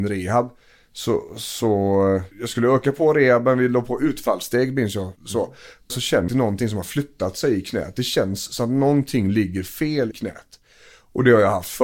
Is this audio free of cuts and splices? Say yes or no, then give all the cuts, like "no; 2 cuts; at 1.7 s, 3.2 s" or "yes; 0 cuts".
no; 5 cuts; at 2.3 s, 5.2 s, 5.9 s, 6.3 s, 10.1 s